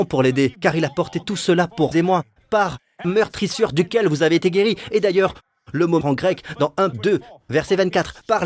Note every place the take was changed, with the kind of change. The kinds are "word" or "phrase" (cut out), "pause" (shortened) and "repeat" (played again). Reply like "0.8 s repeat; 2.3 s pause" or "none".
1.9 s word; 3.0 s word; 6.0 s word; 6.9 s word